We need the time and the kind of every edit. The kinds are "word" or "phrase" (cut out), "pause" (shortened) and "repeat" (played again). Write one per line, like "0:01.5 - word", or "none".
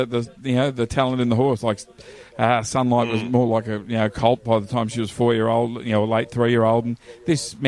none